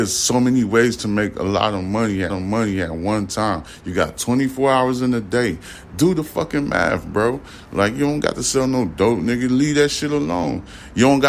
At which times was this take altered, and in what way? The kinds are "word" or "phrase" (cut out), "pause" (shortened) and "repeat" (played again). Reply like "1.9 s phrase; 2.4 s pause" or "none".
2.3 s repeat